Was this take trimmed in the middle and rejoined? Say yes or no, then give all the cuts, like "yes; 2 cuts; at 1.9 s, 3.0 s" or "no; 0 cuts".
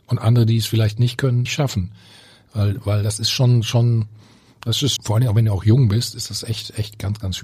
yes; 2 cuts; at 1.5 s, 5.0 s